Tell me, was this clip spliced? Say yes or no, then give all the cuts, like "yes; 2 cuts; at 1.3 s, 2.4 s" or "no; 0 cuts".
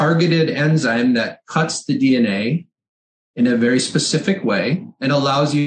no; 0 cuts